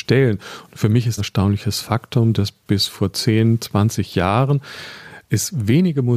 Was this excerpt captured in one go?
no; 1 cut; at 1.2 s

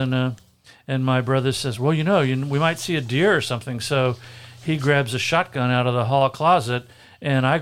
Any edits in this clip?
no; 0 cuts

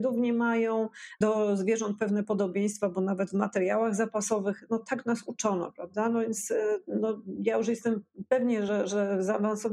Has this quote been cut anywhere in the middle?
no; 0 cuts

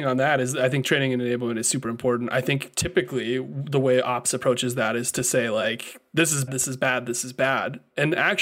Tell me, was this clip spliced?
yes; 1 cut; at 6.5 s

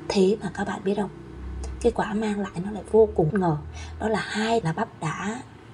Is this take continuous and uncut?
no; 3 cuts; at 1.9 s, 3.3 s, 4.6 s

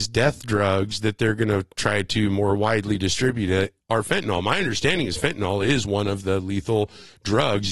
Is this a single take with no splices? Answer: yes; 0 cuts

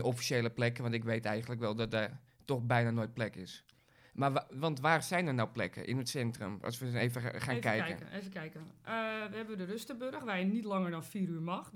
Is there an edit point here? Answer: no; 0 cuts

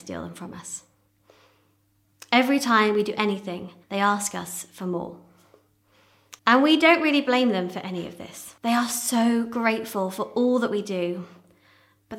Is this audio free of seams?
no; 3 cuts; at 3.8 s, 6.4 s, 8.6 s

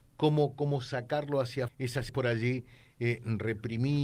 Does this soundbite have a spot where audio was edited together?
yes; 2 cuts; at 1.7 s, 2.1 s

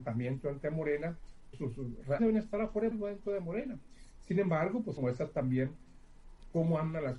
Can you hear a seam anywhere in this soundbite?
yes; 4 cuts; at 1.5 s, 2.2 s, 2.9 s, 5.0 s

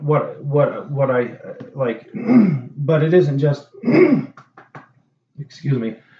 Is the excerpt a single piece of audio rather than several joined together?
yes; 0 cuts

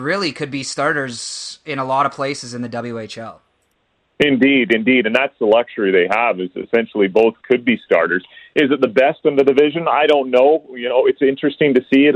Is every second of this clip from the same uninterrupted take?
yes; 0 cuts

